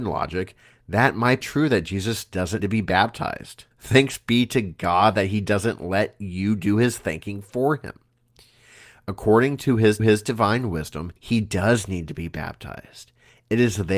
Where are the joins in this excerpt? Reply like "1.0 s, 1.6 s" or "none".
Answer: 1.4 s, 2.6 s, 3.7 s, 10.0 s, 11.2 s